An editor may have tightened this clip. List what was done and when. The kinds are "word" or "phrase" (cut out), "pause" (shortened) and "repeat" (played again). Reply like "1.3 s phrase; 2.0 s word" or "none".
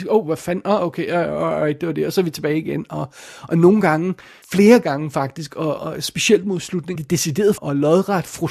4.4 s pause; 5.8 s word; 7.0 s phrase; 7.6 s word